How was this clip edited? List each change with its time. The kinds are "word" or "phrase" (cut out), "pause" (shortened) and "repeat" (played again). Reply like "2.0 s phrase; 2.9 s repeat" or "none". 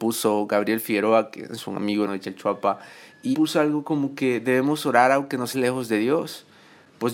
2.1 s word; 3.3 s word; 5.5 s word